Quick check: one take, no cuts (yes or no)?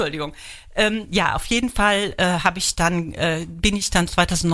yes